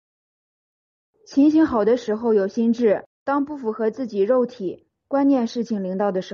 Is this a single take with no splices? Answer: no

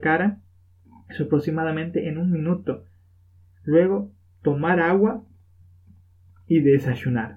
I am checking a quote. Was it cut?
no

